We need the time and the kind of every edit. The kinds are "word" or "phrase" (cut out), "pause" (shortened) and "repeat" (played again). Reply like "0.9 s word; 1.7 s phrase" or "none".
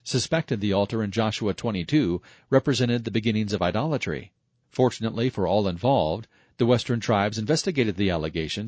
none

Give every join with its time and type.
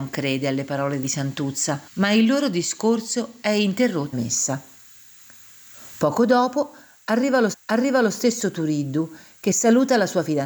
1.9 s pause; 4.1 s phrase; 7.5 s repeat

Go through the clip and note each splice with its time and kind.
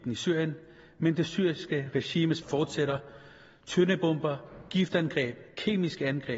2.4 s word

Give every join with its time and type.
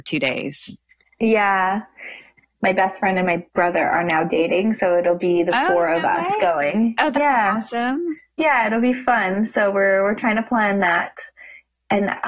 3.5 s pause; 8.3 s pause

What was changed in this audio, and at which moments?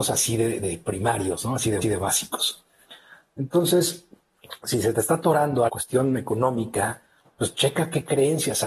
1.8 s repeat; 5.7 s phrase; 7.2 s pause

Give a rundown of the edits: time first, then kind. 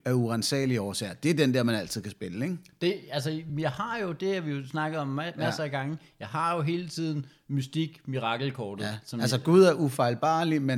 none

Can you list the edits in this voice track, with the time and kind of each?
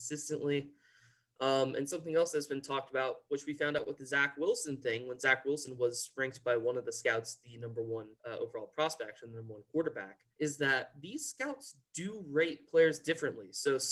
8.2 s pause; 10.3 s pause

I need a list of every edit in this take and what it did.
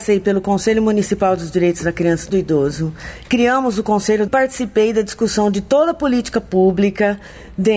2.3 s phrase; 4.3 s phrase

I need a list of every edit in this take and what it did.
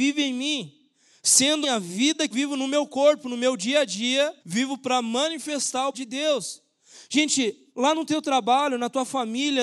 1.6 s word; 2.3 s word; 4.4 s pause; 5.9 s word; 7.7 s pause

